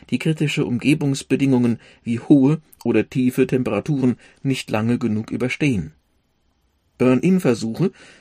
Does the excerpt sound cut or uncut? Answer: uncut